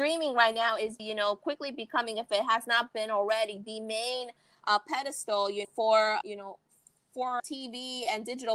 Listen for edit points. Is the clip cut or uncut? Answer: cut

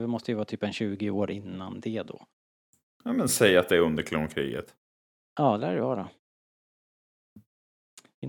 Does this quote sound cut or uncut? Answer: uncut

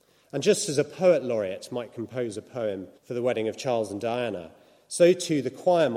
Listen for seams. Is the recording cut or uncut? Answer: cut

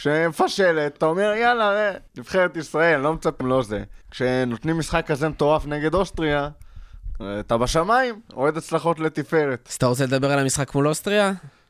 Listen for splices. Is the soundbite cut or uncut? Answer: cut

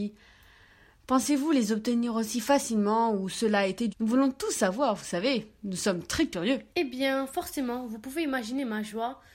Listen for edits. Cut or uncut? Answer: cut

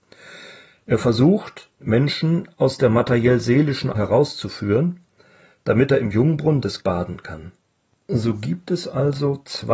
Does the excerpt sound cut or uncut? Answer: cut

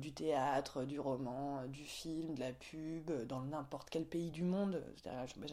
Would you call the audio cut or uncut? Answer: uncut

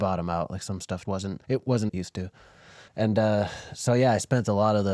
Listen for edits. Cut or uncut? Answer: cut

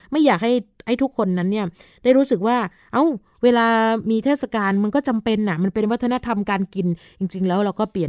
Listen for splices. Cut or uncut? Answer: uncut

